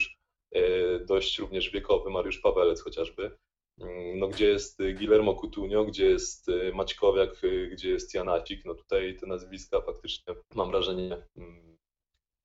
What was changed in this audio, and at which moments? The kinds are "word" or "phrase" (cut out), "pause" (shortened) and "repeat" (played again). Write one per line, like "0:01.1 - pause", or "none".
0:10.4 - pause